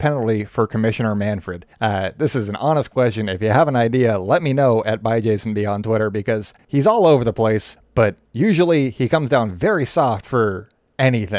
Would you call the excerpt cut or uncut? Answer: uncut